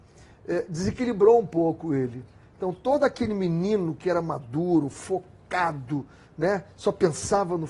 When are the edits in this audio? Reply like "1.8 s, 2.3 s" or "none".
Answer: none